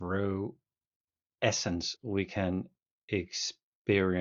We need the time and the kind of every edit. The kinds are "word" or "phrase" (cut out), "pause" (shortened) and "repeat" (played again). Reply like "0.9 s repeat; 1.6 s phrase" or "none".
none